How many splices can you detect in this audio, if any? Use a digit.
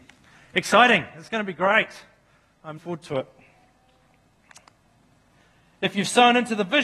1